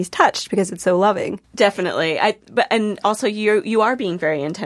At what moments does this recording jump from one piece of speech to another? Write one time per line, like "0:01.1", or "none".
0:01.4